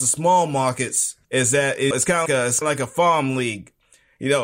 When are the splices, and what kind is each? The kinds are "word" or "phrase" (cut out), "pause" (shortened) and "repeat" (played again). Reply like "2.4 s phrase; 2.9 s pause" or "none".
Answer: 1.2 s pause; 1.9 s word; 2.3 s word; 2.6 s word